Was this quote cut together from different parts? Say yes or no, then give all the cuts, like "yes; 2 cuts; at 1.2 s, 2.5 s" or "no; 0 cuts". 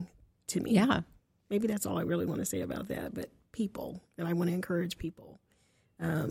no; 0 cuts